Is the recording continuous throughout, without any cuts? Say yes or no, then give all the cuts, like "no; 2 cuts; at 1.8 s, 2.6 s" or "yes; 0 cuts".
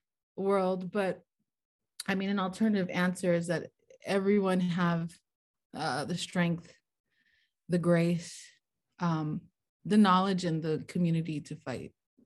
yes; 0 cuts